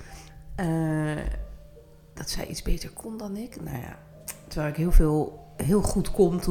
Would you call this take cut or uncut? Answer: uncut